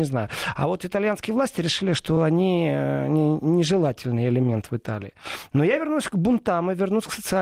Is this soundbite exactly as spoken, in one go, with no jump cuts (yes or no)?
yes